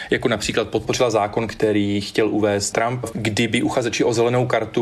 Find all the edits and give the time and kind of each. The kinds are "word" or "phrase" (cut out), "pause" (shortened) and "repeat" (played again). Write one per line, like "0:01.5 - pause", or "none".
0:02.7 - word
0:03.1 - word